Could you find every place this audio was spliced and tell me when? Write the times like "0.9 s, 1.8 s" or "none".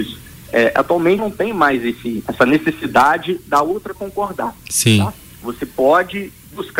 1.2 s, 2.3 s, 3.9 s